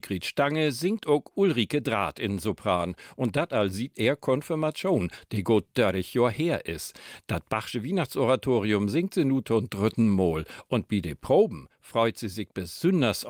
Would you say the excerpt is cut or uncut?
uncut